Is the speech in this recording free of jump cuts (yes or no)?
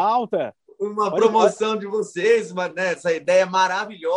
yes